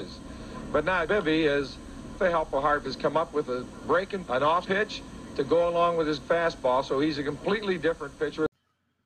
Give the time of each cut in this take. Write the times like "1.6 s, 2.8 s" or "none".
1.1 s, 2.2 s, 2.8 s, 4.3 s, 4.6 s, 6.2 s